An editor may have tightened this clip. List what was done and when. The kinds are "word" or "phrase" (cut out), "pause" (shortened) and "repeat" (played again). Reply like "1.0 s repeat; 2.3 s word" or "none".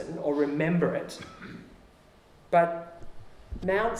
none